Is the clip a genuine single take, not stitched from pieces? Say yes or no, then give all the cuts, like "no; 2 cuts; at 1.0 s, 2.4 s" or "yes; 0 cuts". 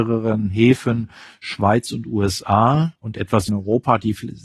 no; 2 cuts; at 3.0 s, 3.5 s